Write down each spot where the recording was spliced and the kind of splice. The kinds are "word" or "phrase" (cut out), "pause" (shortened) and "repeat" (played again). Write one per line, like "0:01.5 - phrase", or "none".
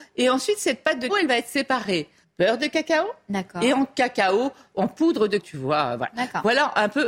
0:01.1 - word
0:02.2 - word
0:05.4 - word